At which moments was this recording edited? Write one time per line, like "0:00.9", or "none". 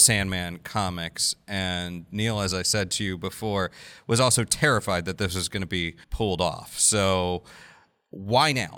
0:06.0

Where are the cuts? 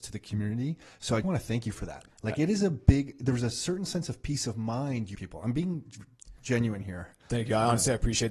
0:01.2
0:02.1
0:05.1

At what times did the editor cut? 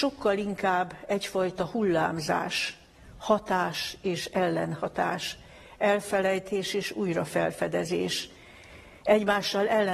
none

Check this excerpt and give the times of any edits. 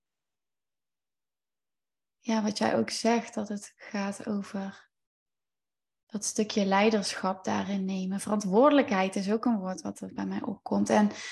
none

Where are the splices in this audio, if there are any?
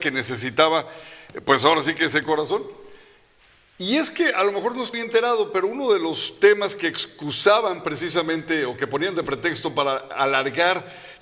0:04.9

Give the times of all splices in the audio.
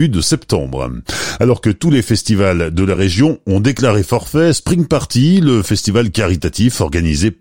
none

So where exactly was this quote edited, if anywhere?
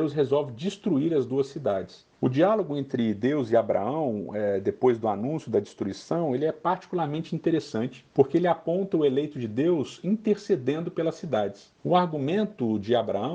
0:02.1
0:08.1
0:11.8

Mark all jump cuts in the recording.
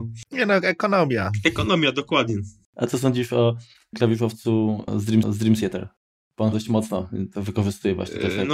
0:05.2
0:06.5

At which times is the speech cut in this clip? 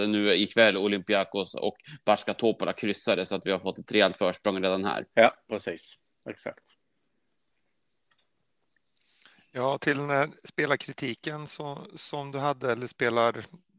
none

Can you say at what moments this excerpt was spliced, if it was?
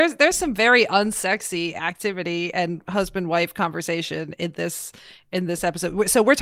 none

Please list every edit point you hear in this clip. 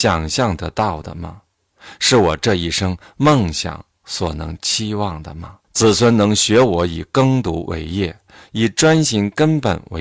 0:05.6

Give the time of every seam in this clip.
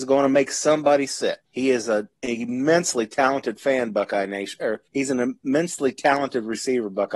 0:01.4
0:04.9

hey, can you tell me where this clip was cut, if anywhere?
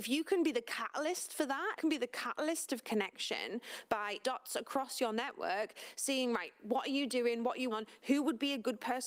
0:01.8
0:04.2
0:07.7

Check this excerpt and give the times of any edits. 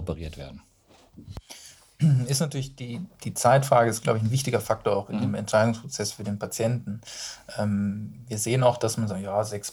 none

